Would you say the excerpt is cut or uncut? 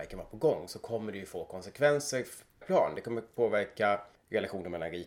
cut